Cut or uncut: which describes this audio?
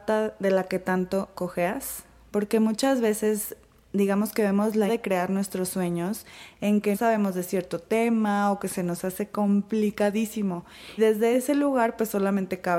cut